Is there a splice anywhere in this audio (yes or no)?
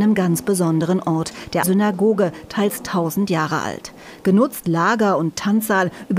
yes